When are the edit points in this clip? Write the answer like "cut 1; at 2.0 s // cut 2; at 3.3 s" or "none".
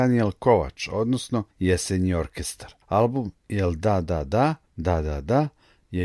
cut 1; at 1.5 s // cut 2; at 2.8 s // cut 3; at 4.6 s